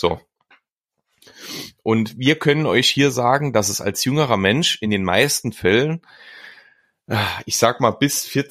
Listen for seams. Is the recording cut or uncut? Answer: uncut